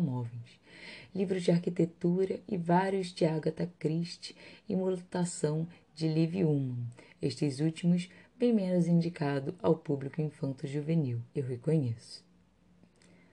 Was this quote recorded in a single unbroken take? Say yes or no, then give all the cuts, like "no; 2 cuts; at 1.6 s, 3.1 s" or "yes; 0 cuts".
no; 1 cut; at 11.3 s